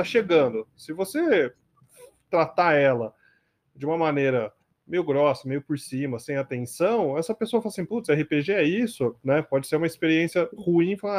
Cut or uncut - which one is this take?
uncut